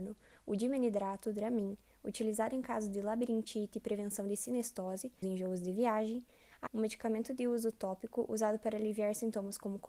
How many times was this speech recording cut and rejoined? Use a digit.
2